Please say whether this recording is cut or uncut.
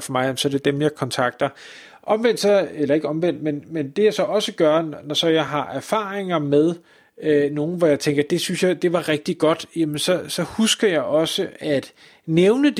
uncut